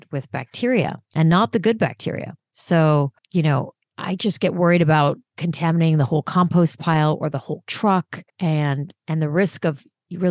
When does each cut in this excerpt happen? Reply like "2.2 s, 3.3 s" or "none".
1.0 s, 3.2 s, 5.3 s, 8.3 s